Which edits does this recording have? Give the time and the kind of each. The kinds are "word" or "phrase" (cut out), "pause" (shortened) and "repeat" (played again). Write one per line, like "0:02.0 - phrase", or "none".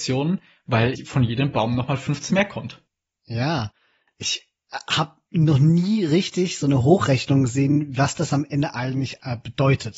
0:00.9 - word
0:02.3 - word

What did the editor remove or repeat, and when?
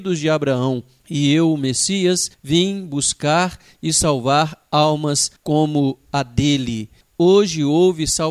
0:02.3 - pause
0:05.4 - pause

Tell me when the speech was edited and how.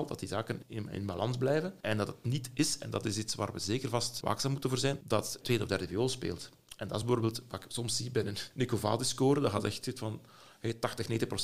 none

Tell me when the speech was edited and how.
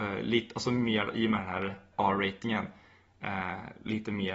0:01.9 - word

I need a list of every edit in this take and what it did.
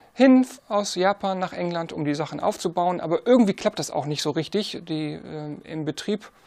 none

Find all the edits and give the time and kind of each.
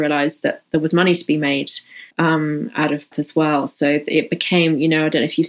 0:02.1 - pause
0:03.1 - word

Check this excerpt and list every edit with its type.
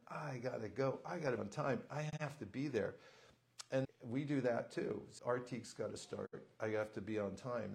0:01.4 - word
0:03.8 - word
0:05.2 - word

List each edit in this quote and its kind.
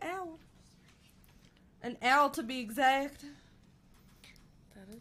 none

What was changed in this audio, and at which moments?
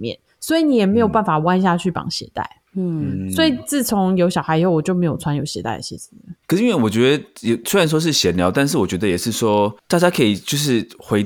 0:02.7 - pause
0:06.4 - pause
0:09.8 - pause

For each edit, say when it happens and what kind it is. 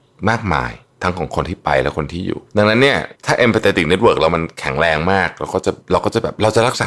0:02.5 - pause
0:03.1 - pause
0:05.8 - pause

